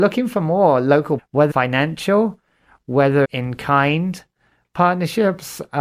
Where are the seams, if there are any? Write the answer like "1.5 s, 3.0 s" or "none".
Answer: 1.2 s, 1.5 s, 3.2 s